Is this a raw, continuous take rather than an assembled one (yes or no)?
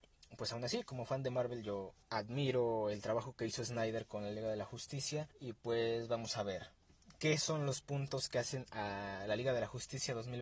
no